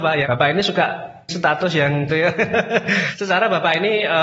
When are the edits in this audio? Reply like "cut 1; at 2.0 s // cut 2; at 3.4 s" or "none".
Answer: cut 1; at 1.3 s // cut 2; at 2.1 s

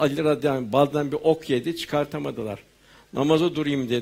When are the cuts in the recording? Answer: none

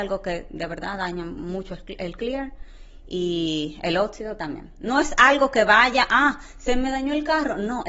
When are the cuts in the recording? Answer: none

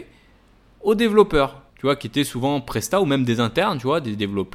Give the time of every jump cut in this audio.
cut 1; at 1.7 s

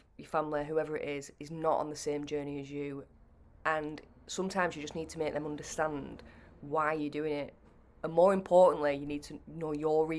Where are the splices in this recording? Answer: none

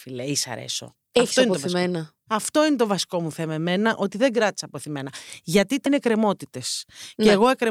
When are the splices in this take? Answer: cut 1; at 5.9 s

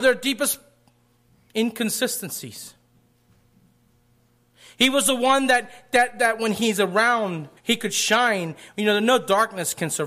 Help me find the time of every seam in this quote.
cut 1; at 7.6 s

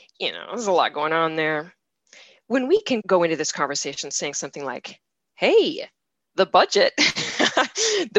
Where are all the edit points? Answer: cut 1; at 3.0 s

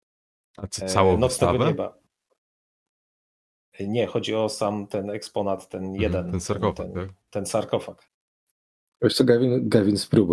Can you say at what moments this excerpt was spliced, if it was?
none

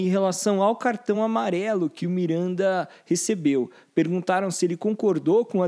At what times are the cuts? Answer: none

